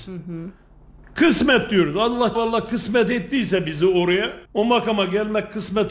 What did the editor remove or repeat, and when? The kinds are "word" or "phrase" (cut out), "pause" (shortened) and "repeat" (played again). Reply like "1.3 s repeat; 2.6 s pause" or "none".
2.3 s word; 4.4 s pause